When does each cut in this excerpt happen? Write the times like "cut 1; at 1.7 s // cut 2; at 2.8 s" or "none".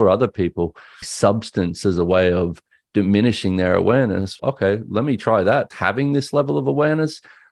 cut 1; at 1.0 s // cut 2; at 4.4 s // cut 3; at 5.7 s